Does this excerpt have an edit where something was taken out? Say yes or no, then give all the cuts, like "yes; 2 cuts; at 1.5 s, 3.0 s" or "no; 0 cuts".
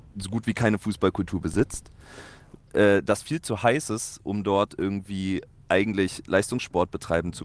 no; 0 cuts